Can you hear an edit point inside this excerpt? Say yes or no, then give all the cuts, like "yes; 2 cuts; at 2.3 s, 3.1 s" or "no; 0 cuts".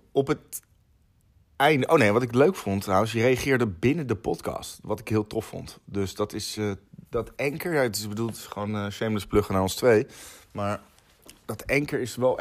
no; 0 cuts